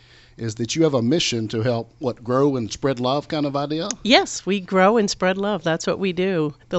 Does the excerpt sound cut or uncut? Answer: uncut